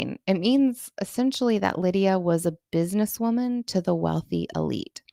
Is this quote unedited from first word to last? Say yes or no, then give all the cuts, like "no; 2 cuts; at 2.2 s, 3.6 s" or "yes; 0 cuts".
yes; 0 cuts